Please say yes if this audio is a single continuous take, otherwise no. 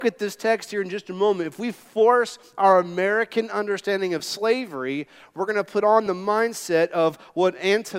yes